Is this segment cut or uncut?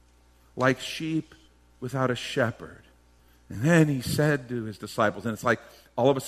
uncut